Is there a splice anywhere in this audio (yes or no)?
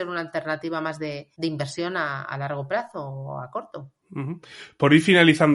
yes